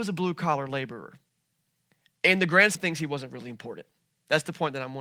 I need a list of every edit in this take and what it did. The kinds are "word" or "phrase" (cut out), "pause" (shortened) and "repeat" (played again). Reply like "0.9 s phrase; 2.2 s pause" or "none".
2.7 s word